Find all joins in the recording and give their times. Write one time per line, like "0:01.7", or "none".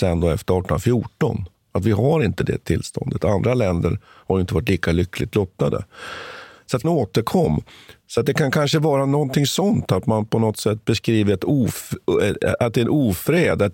0:06.8